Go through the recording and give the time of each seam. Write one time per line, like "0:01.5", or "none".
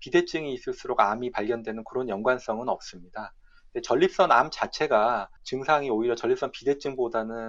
0:05.4

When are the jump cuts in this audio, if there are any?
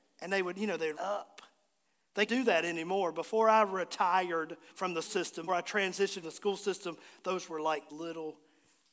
0:00.9
0:02.3
0:04.7
0:05.0
0:05.5
0:06.2
0:07.5
0:07.9

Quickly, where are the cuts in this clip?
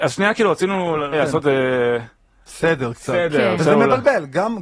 0:01.1

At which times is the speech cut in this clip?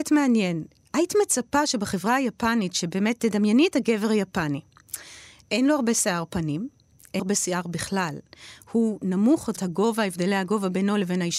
0:07.2
0:09.6

